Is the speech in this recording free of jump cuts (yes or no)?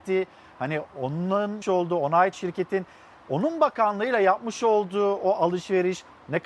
no